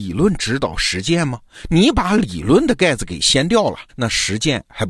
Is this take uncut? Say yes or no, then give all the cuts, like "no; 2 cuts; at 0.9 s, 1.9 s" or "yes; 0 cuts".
no; 1 cut; at 3.9 s